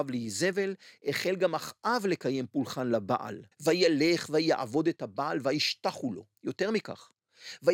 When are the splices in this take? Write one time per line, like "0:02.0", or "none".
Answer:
0:03.5
0:06.3